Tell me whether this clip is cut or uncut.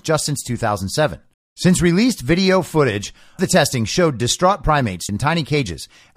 cut